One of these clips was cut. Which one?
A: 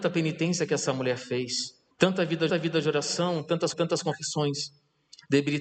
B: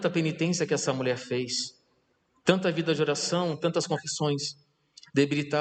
A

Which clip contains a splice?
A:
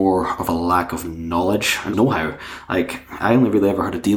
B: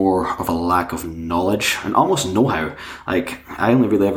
A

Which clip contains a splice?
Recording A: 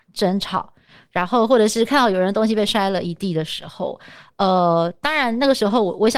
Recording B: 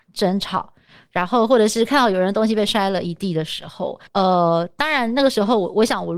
B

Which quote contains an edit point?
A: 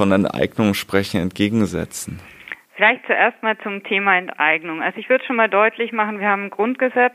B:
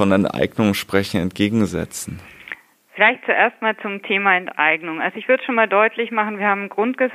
A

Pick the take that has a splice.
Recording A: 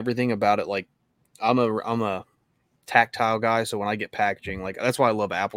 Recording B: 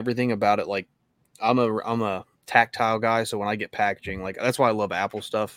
B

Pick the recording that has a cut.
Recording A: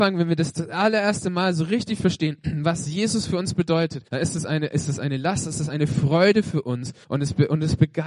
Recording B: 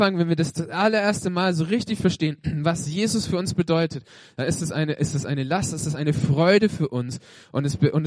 A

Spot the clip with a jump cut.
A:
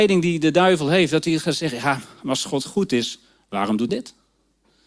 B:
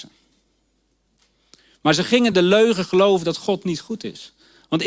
A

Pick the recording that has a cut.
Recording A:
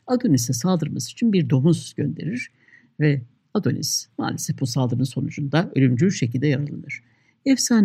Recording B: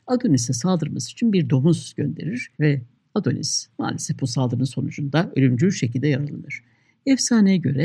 B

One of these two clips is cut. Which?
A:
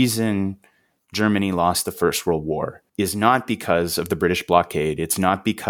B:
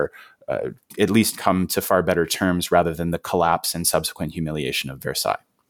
A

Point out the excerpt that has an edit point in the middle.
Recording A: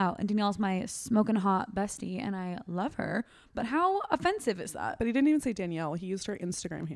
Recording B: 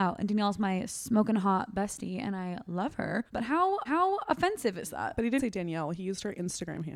B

